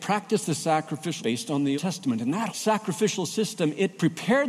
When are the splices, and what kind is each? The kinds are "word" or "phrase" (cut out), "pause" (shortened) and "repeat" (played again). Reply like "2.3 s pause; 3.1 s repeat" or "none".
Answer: 1.2 s word; 1.8 s word; 2.5 s word

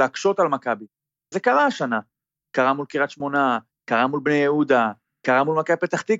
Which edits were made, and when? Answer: none

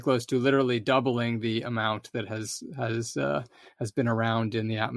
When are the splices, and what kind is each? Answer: none

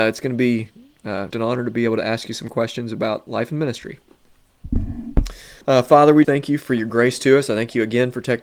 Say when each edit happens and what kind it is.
1.3 s word; 5.6 s pause; 6.2 s word

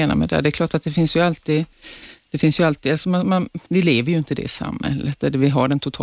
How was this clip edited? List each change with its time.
3.7 s pause

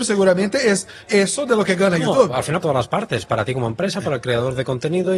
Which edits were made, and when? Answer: 2.6 s word

